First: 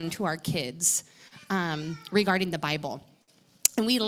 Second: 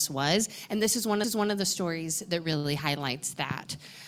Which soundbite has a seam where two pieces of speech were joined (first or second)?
second